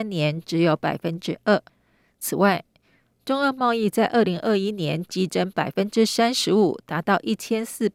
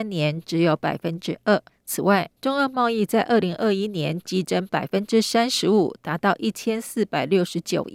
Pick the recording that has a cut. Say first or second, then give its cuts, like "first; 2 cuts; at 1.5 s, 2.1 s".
second; 2 cuts; at 1.7 s, 2.4 s